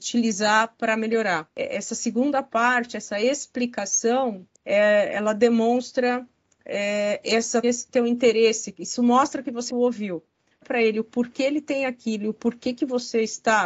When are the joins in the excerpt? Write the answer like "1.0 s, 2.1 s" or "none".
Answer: 1.5 s, 4.5 s, 7.6 s, 9.7 s, 10.6 s